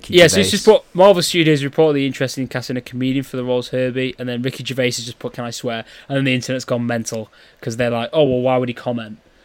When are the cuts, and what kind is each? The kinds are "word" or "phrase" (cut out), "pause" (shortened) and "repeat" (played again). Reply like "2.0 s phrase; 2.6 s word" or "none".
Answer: none